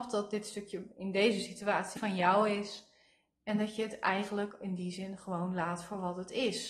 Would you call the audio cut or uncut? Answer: cut